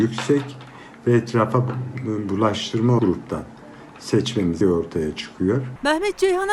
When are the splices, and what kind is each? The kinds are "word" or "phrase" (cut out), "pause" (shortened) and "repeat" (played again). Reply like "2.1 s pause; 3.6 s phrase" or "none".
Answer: 3.0 s phrase; 4.6 s word